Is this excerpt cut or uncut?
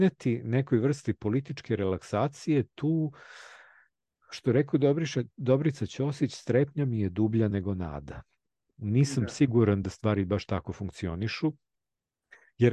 uncut